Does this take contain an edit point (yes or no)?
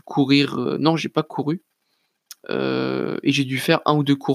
no